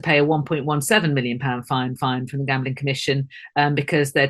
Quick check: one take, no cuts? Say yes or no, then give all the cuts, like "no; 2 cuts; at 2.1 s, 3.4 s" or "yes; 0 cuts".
no; 1 cut; at 2.0 s